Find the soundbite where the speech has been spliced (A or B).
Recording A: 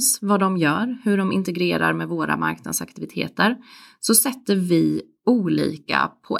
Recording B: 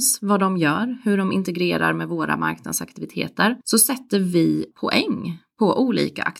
B